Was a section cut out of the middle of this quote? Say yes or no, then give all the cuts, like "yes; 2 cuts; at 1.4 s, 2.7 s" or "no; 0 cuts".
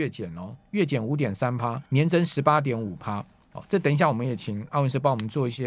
yes; 1 cut; at 1.9 s